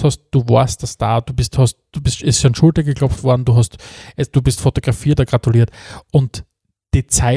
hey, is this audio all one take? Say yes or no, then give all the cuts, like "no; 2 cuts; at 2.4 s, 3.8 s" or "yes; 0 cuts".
no; 1 cut; at 5.2 s